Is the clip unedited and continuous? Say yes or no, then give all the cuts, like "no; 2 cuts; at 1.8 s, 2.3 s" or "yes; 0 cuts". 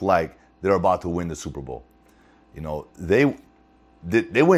yes; 0 cuts